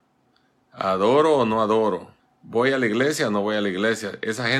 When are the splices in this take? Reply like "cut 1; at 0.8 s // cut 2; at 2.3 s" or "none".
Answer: cut 1; at 2.2 s